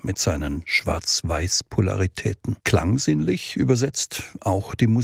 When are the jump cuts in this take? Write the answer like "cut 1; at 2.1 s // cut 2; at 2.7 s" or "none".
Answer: cut 1; at 2.6 s